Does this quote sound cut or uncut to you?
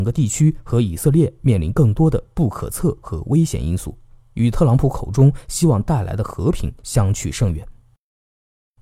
uncut